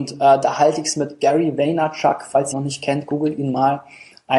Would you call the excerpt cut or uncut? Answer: cut